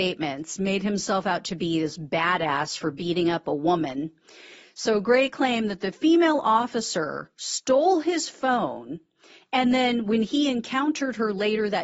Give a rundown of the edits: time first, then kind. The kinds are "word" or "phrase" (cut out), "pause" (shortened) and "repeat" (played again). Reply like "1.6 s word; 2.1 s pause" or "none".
none